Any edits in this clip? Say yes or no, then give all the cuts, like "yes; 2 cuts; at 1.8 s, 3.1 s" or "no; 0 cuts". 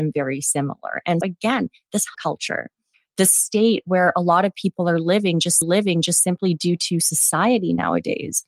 yes; 3 cuts; at 1.2 s, 2.1 s, 5.6 s